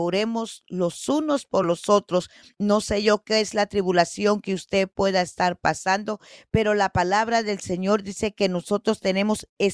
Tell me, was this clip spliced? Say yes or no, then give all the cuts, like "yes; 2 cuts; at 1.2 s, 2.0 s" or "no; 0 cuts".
no; 0 cuts